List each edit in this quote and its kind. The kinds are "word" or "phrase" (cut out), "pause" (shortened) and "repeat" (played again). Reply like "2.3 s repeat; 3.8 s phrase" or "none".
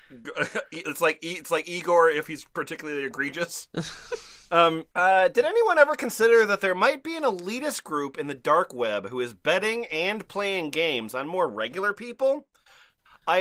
4.9 s pause

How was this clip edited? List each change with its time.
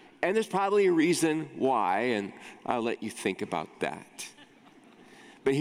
none

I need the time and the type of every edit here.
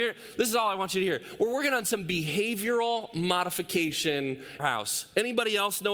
4.6 s phrase

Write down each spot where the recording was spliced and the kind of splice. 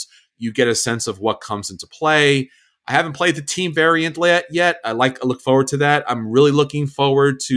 none

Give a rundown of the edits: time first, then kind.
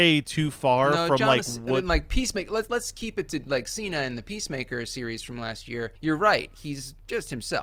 2.7 s word; 6.0 s pause

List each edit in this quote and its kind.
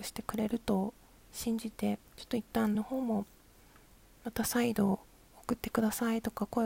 2.1 s pause; 2.7 s word

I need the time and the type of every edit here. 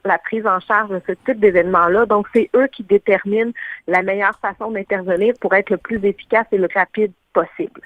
6.7 s word

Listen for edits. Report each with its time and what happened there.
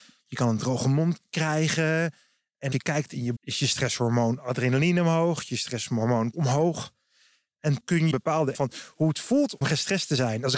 2.7 s word; 3.4 s word; 6.3 s word; 7.8 s word; 8.1 s word; 8.5 s word; 9.6 s word

